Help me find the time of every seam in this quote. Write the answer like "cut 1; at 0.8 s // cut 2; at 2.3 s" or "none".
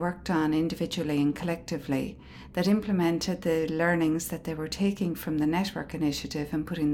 none